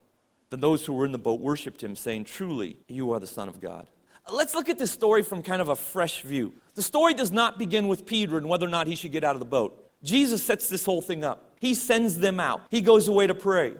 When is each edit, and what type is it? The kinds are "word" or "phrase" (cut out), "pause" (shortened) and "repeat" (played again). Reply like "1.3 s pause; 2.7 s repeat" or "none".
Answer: 2.8 s pause; 4.1 s pause; 6.6 s pause; 9.9 s pause; 11.6 s pause; 12.7 s pause